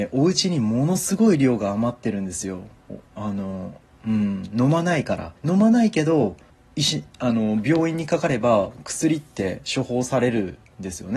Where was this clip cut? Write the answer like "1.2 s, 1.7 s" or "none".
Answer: 3.1 s, 5.4 s, 6.5 s